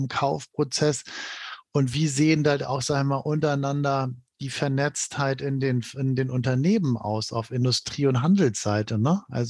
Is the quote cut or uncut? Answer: uncut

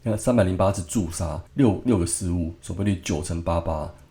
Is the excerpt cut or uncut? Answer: cut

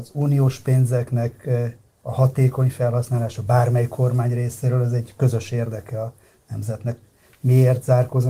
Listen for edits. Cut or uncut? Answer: uncut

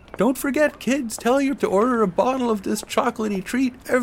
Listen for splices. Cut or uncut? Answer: cut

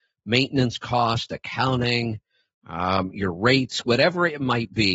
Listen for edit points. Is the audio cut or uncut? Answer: uncut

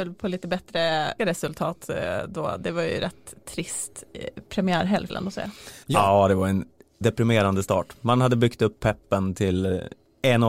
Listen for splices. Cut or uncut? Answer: cut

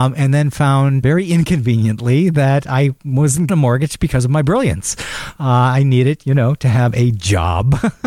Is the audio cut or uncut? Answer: cut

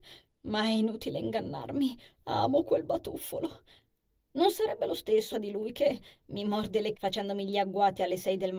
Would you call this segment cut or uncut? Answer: cut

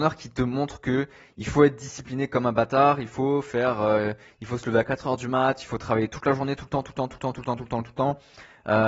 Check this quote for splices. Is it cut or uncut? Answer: uncut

